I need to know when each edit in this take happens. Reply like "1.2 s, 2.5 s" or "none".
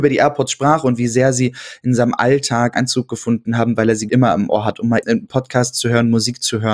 2.7 s, 4.1 s, 5.0 s